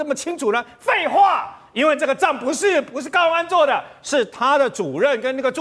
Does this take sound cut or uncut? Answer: uncut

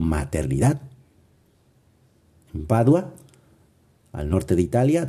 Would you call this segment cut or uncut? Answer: uncut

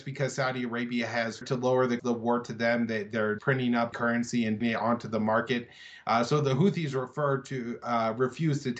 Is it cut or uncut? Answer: cut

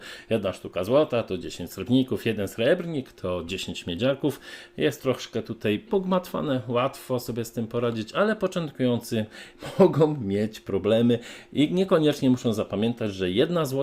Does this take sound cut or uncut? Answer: cut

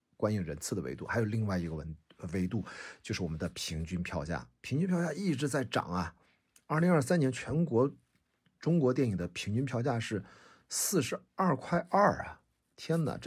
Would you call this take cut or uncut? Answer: uncut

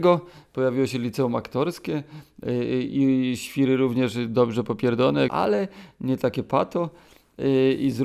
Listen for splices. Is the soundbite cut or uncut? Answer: cut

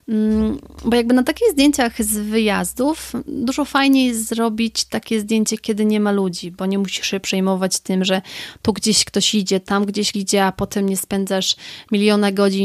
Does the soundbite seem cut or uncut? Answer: cut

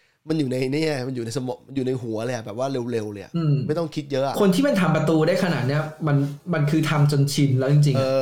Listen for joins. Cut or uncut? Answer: uncut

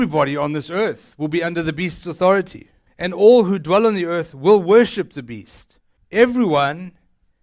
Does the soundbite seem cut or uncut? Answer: cut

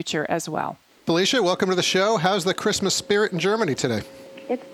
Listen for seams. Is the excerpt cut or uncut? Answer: uncut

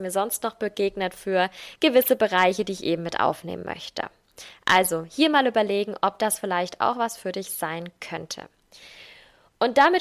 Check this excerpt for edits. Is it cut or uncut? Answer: uncut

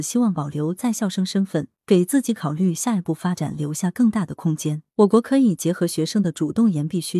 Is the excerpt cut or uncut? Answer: cut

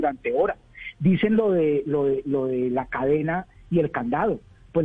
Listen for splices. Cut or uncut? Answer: uncut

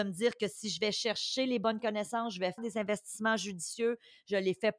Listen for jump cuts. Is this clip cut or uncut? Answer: cut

